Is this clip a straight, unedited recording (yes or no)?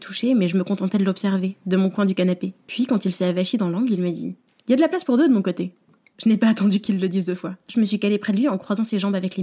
yes